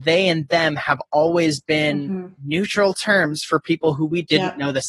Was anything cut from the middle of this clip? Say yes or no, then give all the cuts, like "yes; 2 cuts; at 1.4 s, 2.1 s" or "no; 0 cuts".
no; 0 cuts